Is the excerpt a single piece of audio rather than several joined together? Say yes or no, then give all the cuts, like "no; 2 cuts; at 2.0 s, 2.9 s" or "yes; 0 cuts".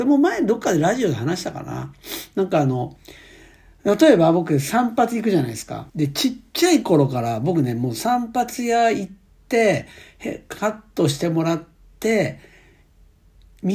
no; 1 cut; at 5.9 s